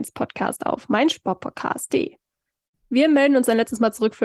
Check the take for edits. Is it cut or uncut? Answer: uncut